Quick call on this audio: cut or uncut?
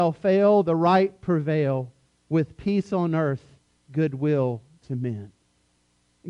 uncut